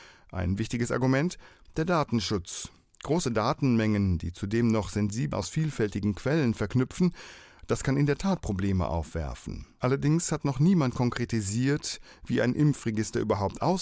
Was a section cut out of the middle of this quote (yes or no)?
yes